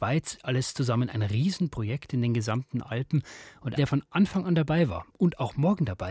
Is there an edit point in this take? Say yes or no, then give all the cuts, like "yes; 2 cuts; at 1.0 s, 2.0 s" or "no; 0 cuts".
yes; 1 cut; at 3.8 s